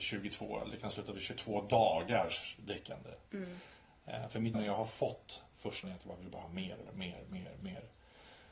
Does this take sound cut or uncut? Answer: cut